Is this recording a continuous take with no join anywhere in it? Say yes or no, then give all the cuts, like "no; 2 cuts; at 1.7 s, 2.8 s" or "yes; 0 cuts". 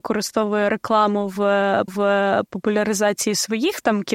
no; 1 cut; at 1.9 s